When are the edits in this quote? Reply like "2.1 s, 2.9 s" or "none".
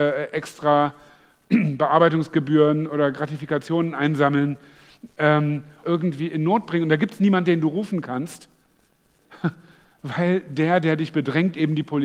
5.8 s